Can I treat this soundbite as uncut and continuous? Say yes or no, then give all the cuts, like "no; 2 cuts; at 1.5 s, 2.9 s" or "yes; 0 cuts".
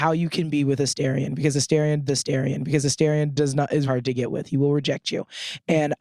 no; 2 cuts; at 2.1 s, 3.9 s